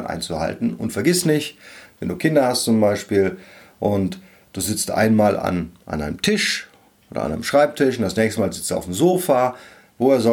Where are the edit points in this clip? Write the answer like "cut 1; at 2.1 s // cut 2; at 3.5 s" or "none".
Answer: none